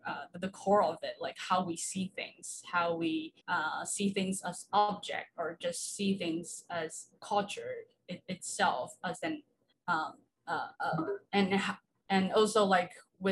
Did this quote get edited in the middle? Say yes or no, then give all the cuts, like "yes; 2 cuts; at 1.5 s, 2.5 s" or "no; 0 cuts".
yes; 3 cuts; at 3.4 s, 9.7 s, 10.7 s